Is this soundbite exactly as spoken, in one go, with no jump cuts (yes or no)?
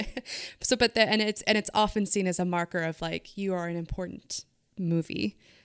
yes